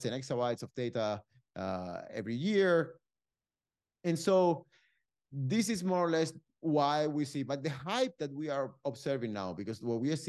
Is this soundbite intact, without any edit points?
yes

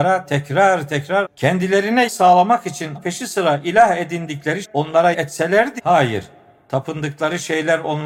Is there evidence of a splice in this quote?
yes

